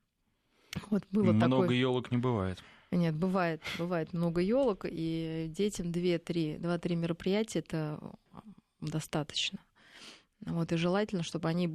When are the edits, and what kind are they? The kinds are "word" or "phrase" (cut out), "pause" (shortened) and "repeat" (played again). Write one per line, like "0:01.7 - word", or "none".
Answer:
none